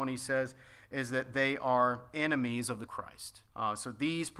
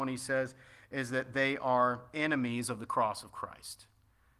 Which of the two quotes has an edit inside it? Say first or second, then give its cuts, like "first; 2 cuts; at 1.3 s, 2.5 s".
first; 2 cuts; at 2.9 s, 3.5 s